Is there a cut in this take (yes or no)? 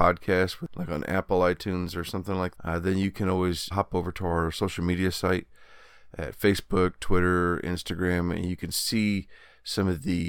yes